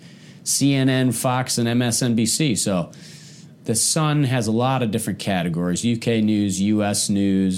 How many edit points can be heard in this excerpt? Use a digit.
1